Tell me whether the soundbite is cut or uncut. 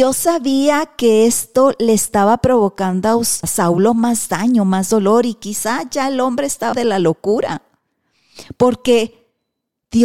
cut